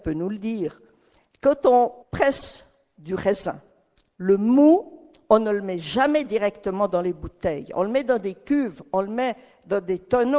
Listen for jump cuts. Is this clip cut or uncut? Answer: cut